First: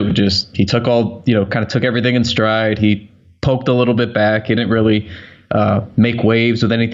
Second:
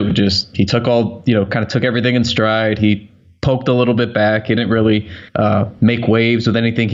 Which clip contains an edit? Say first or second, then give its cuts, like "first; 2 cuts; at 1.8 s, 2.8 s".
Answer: second; 1 cut; at 5.3 s